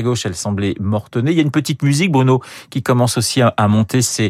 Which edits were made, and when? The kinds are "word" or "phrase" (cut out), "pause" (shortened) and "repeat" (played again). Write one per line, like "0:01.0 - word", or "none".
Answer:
none